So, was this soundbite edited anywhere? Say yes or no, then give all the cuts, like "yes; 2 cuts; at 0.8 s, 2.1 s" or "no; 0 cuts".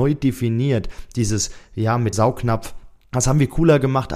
yes; 1 cut; at 2.1 s